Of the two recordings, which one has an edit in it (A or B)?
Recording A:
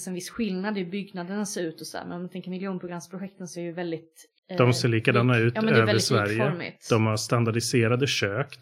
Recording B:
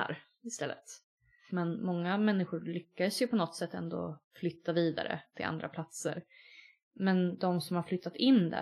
A